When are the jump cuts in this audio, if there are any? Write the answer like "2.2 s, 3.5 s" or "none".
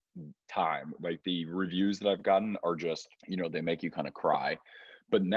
3.2 s